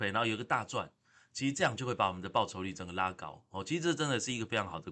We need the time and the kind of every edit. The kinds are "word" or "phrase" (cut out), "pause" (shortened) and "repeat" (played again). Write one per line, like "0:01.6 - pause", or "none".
none